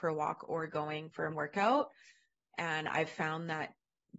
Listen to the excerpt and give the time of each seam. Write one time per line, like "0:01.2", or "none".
0:01.3